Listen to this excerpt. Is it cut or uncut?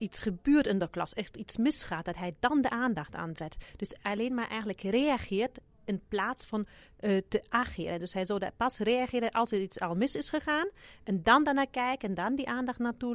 uncut